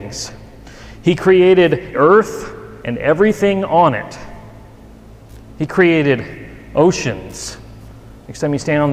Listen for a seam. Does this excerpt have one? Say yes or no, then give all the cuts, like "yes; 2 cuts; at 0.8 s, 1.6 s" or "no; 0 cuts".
yes; 2 cuts; at 1.9 s, 2.8 s